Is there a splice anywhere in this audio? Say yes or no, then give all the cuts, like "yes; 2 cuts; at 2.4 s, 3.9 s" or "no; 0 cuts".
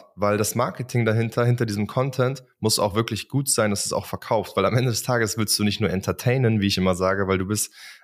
no; 0 cuts